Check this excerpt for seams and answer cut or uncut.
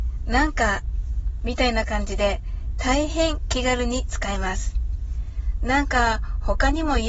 cut